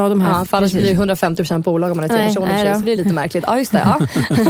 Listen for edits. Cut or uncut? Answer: uncut